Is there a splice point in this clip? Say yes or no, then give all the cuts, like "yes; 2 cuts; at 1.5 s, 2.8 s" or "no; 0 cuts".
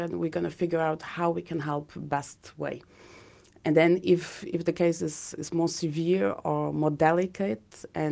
no; 0 cuts